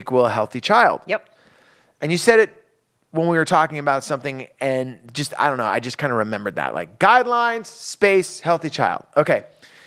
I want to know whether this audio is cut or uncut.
uncut